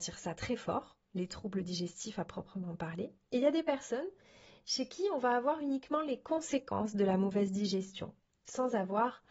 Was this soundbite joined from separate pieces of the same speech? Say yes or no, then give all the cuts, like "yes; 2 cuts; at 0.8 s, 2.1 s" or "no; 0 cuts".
no; 0 cuts